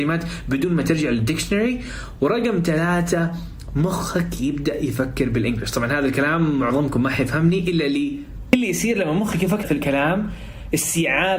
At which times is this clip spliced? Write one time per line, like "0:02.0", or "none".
0:09.6